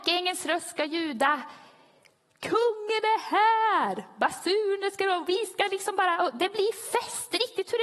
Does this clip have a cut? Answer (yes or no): no